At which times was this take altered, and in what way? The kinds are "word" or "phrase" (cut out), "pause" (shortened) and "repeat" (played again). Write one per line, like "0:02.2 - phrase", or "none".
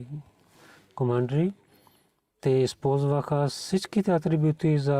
0:03.5 - word